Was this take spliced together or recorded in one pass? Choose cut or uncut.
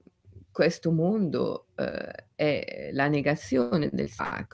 uncut